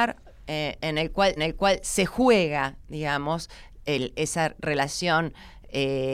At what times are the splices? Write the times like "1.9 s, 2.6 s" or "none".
1.4 s